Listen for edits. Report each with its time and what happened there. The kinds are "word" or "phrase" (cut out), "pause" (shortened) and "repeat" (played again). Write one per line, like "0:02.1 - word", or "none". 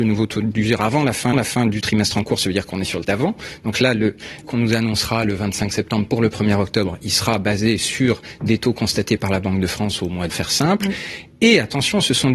0:01.3 - repeat
0:03.0 - word
0:04.4 - phrase
0:10.3 - phrase